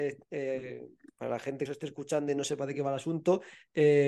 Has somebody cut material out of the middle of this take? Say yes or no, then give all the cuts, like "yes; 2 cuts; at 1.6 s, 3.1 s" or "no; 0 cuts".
yes; 1 cut; at 1.7 s